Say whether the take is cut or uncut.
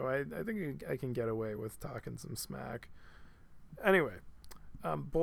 uncut